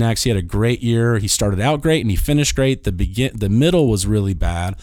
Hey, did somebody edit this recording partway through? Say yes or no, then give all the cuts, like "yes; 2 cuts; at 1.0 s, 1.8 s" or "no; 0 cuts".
no; 0 cuts